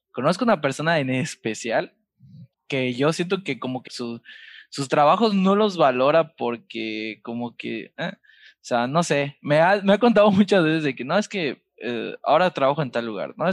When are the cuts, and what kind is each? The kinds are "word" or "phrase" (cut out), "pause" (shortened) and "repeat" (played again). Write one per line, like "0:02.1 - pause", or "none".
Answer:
0:02.5 - pause
0:03.9 - word

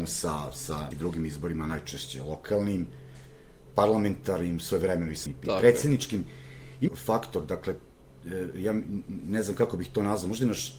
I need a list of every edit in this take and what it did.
0:00.9 - word
0:05.3 - word
0:06.9 - phrase

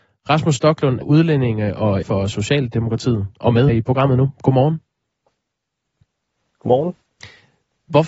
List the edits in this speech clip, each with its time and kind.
0:01.0 - word
0:02.0 - word
0:03.7 - word

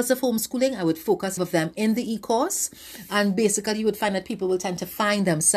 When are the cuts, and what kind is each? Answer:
0:01.4 - phrase

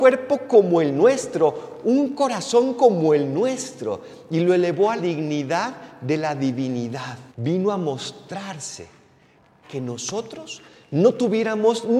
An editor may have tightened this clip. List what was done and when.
0:05.0 - word
0:07.3 - pause
0:09.6 - phrase

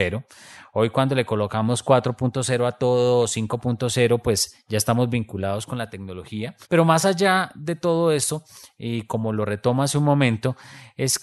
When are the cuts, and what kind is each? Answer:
0:06.6 - pause

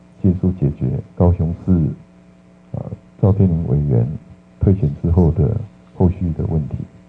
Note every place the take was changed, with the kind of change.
0:01.1 - pause

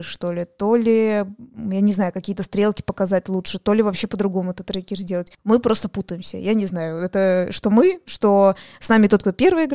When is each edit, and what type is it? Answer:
0:05.3 - pause

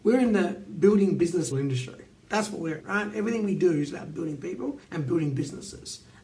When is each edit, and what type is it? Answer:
0:01.5 - phrase
0:02.8 - word
0:04.8 - pause

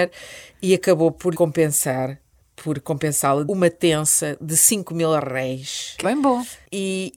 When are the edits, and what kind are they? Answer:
0:01.3 - word
0:03.5 - word
0:06.0 - word

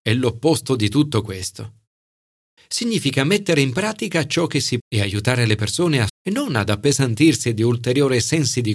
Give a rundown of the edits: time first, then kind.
0:04.8 - word
0:06.1 - word

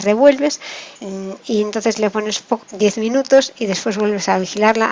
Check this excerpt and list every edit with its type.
0:01.0 - pause
0:02.6 - word

